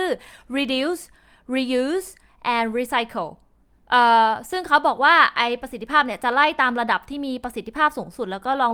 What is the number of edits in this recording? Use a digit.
0